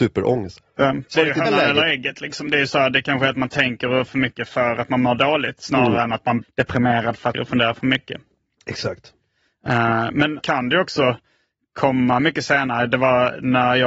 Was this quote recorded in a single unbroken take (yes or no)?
no